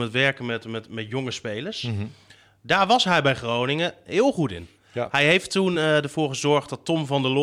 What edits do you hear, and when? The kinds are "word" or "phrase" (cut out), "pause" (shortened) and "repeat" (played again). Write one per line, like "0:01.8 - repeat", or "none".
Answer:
none